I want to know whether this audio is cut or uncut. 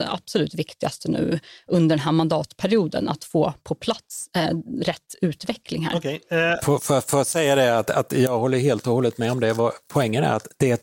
uncut